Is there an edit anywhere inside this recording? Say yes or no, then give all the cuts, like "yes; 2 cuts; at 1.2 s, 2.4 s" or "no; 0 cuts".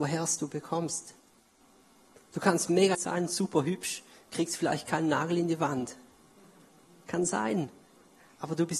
yes; 1 cut; at 2.9 s